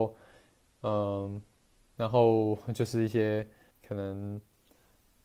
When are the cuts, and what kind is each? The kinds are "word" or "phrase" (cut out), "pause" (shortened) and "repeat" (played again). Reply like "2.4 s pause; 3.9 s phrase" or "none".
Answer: 3.7 s word